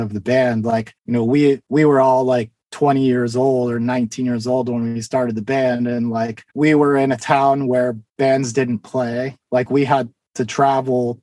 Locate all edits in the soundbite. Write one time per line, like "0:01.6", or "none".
0:01.0
0:01.6
0:02.6
0:06.5
0:08.1
0:09.4